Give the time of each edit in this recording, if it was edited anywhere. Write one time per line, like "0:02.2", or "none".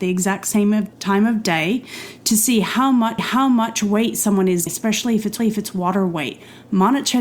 0:00.9
0:03.2
0:04.7
0:05.4